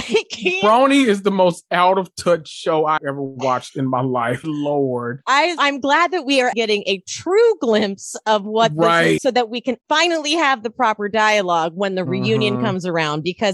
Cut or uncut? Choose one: cut